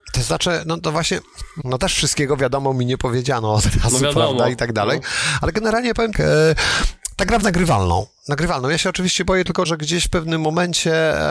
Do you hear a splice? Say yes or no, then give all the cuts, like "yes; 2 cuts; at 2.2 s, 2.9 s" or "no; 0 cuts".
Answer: yes; 4 cuts; at 1.6 s, 6.1 s, 7.4 s, 9.6 s